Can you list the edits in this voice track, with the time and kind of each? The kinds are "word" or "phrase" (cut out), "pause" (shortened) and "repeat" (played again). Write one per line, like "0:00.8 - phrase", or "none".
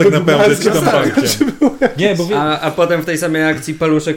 none